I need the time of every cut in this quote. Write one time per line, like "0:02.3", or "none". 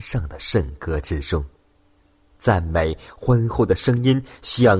none